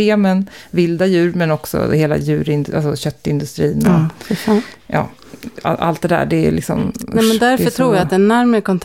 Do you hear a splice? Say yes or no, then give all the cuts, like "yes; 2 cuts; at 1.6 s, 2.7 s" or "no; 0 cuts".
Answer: no; 0 cuts